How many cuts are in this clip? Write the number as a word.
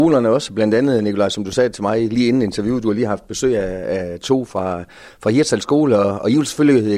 zero